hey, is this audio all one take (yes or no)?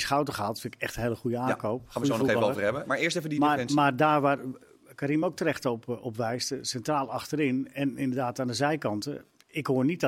yes